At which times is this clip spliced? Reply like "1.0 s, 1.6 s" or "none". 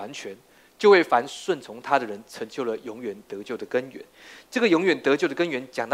none